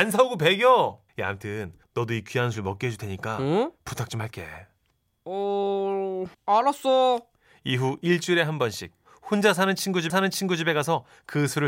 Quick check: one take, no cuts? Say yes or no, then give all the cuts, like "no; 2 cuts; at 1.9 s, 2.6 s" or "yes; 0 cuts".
no; 4 cuts; at 1.1 s, 1.8 s, 6.3 s, 10.1 s